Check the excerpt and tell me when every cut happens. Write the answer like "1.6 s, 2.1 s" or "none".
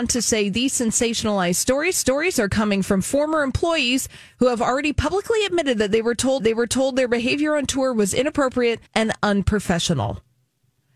1.9 s, 6.4 s, 8.9 s